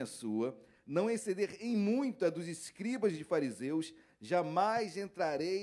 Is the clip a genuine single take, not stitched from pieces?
yes; 0 cuts

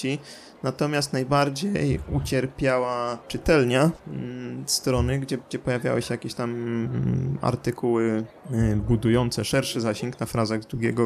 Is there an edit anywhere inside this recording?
no; 0 cuts

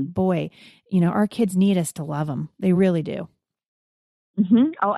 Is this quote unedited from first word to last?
yes; 0 cuts

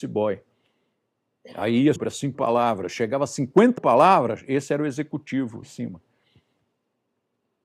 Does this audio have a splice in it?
yes; 4 cuts; at 2.0 s, 2.3 s, 3.8 s, 5.6 s

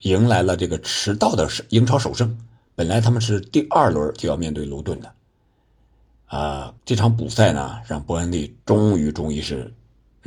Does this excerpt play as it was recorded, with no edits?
no; 1 cut; at 6.8 s

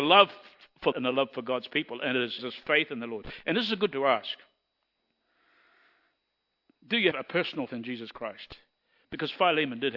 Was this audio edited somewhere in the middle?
yes; 5 cuts; at 0.9 s, 2.4 s, 3.9 s, 7.1 s, 7.7 s

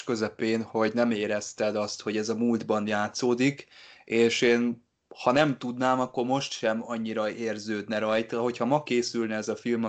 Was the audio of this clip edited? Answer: no; 0 cuts

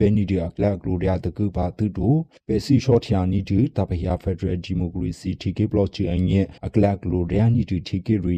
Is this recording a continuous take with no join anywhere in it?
no; 1 cut; at 6.6 s

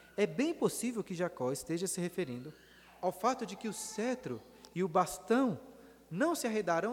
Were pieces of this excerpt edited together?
no; 0 cuts

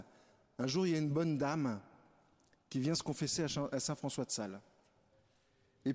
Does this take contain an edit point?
no; 0 cuts

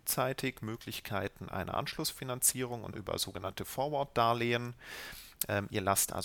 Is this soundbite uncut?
no; 1 cut; at 2.9 s

